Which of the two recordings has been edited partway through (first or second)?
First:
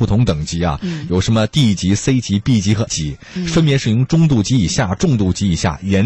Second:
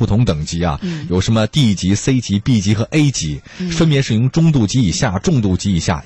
first